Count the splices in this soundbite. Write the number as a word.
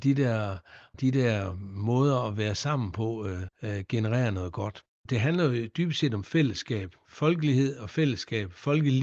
two